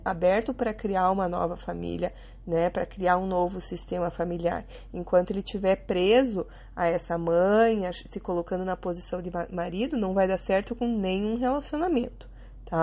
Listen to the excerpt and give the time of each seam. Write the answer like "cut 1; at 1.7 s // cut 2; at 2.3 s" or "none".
none